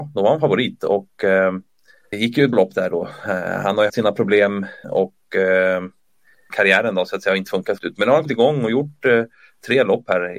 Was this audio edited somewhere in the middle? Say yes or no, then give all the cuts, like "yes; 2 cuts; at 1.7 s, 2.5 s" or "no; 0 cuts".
yes; 8 cuts; at 2.1 s, 2.5 s, 3.9 s, 4.8 s, 6.5 s, 7.4 s, 7.8 s, 8.2 s